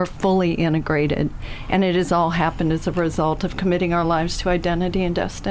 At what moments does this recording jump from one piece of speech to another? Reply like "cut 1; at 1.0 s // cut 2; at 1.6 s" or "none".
none